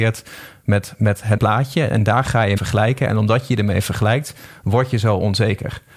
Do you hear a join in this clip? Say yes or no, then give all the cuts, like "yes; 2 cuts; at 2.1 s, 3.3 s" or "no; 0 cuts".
yes; 2 cuts; at 1.4 s, 2.6 s